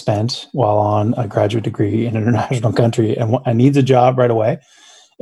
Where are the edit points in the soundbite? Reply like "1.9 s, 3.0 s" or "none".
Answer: none